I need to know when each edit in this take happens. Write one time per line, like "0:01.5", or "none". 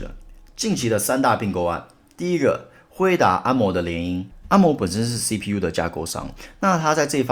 none